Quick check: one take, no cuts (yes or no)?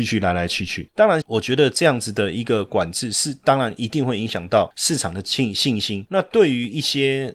no